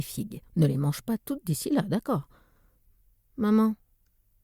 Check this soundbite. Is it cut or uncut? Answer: uncut